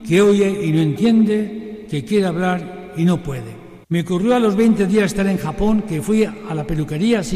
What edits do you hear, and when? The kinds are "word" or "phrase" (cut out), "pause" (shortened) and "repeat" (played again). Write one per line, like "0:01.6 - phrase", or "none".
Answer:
0:03.8 - pause